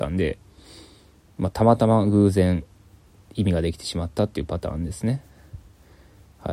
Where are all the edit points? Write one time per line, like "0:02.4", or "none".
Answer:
none